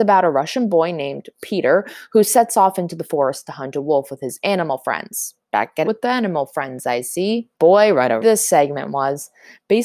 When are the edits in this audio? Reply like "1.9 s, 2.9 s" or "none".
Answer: 1.3 s, 5.4 s, 5.8 s, 7.5 s, 8.2 s